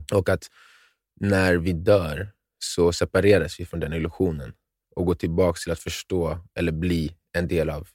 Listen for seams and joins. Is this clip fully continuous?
yes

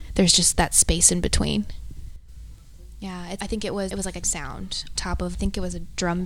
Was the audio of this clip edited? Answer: yes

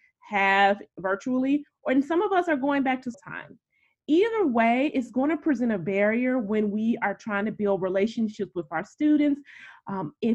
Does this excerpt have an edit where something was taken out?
yes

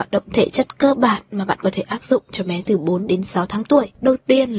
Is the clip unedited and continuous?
yes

